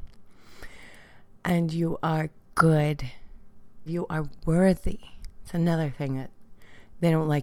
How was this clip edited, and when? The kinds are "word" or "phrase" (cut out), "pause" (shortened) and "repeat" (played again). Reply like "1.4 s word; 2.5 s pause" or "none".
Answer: 3.9 s word